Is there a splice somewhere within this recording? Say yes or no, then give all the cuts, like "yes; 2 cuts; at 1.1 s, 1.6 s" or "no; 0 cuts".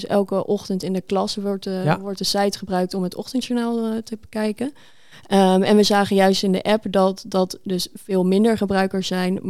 no; 0 cuts